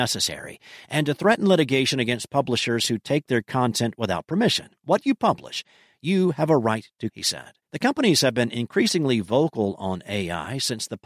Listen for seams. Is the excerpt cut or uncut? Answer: cut